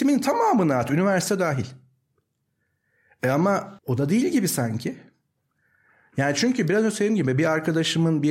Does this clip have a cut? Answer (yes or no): yes